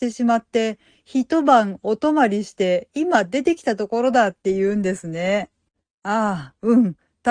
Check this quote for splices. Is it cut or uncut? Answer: uncut